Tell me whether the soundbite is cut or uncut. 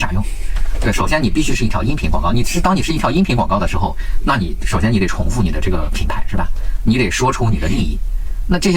cut